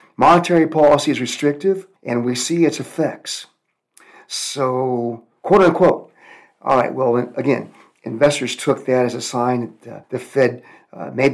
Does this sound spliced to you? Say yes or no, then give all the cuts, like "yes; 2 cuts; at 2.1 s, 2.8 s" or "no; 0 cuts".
yes; 2 cuts; at 2.0 s, 10.0 s